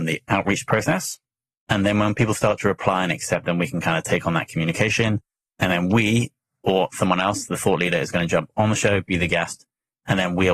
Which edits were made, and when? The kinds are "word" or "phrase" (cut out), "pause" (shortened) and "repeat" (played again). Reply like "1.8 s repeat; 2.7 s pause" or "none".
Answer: none